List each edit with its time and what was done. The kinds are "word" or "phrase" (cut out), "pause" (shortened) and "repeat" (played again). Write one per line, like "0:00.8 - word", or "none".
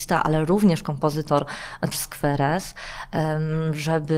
0:01.9 - word